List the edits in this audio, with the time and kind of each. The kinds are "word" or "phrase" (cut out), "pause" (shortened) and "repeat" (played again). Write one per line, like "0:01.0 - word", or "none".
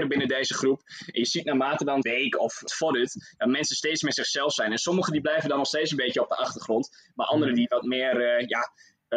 0:02.0 - word
0:02.7 - word